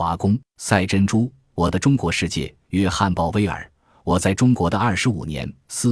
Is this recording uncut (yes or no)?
yes